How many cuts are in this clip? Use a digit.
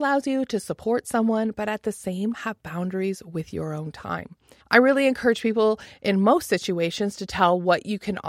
2